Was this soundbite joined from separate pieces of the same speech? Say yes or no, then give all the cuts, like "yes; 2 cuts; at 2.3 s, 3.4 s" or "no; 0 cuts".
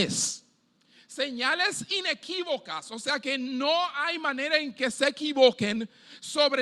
no; 0 cuts